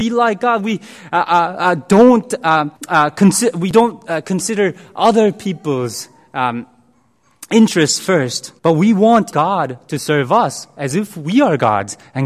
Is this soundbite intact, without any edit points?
no; 3 cuts; at 2.8 s, 8.6 s, 9.3 s

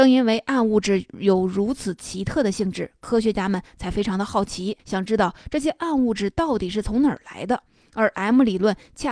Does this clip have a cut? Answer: yes; 1 cut; at 4.8 s

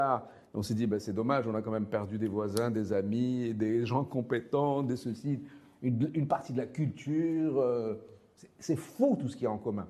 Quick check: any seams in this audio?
no; 0 cuts

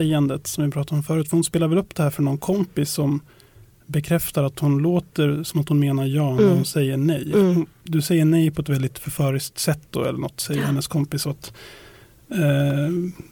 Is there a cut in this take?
no; 0 cuts

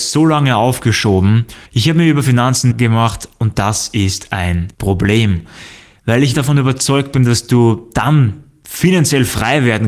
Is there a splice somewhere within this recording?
yes; 4 cuts; at 1.6 s, 2.7 s, 4.7 s, 6.3 s

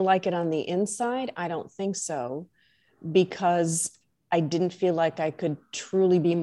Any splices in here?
no; 0 cuts

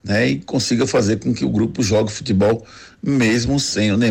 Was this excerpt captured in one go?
yes; 0 cuts

